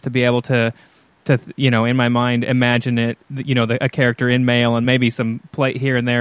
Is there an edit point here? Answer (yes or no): no